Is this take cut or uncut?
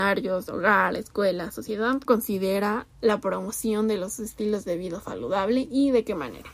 cut